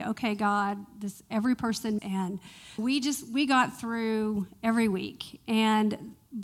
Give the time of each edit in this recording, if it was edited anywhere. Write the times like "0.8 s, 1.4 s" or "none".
2.0 s, 2.8 s